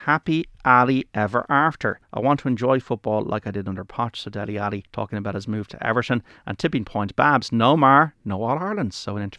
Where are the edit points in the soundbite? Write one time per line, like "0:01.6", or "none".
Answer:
0:02.0
0:04.9